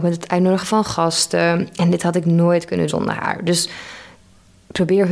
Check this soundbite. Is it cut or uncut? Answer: cut